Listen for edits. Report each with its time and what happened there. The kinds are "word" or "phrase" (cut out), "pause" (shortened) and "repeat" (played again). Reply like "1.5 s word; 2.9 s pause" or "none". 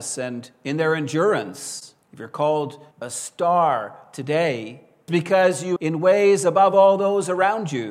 2.0 s pause; 2.9 s pause; 5.1 s word; 5.8 s word